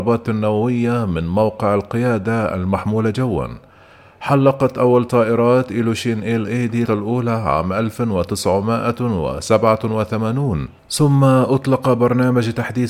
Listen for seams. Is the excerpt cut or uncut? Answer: cut